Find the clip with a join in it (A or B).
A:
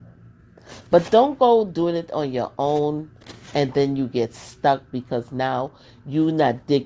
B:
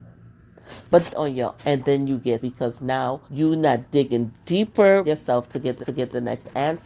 B